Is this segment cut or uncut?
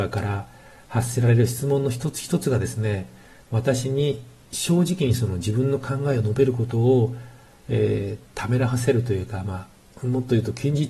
uncut